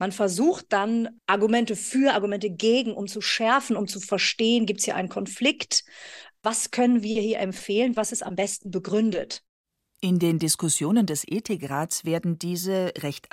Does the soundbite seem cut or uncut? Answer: uncut